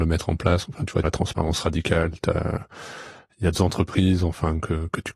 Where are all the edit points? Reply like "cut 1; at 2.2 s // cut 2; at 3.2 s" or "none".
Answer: cut 1; at 1.0 s // cut 2; at 3.5 s